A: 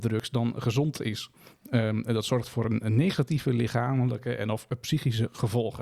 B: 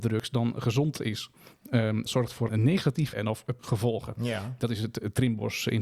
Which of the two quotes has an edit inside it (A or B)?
B